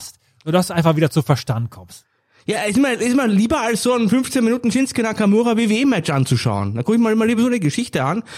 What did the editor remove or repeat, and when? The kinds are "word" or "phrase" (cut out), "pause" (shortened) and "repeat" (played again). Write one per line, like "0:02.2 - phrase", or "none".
none